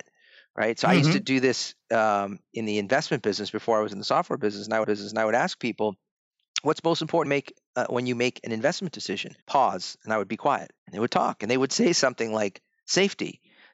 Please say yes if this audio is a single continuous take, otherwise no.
no